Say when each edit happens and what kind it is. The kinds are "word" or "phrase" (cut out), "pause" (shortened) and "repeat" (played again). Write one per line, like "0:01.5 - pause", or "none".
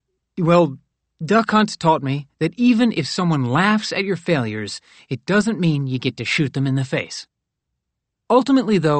none